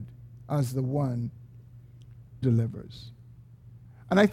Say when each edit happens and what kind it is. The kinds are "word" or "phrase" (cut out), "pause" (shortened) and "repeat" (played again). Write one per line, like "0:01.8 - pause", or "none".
0:02.4 - word